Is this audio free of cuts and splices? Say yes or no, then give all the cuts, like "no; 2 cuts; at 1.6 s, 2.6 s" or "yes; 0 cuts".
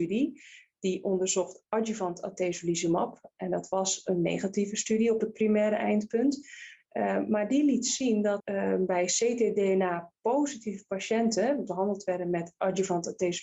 no; 2 cuts; at 8.4 s, 11.7 s